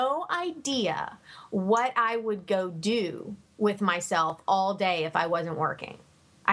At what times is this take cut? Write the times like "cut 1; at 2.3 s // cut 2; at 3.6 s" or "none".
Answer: none